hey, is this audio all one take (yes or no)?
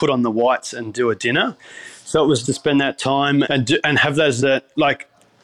no